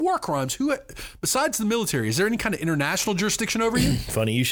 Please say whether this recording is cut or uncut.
uncut